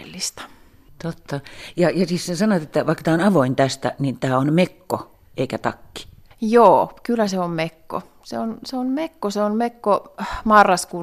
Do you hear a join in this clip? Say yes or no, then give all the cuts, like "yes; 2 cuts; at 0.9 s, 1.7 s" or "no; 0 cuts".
no; 0 cuts